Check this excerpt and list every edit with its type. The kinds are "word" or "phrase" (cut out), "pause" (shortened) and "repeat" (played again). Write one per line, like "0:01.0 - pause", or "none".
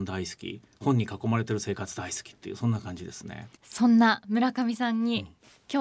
0:03.5 - pause